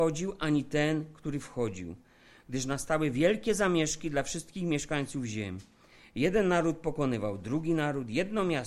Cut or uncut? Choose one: uncut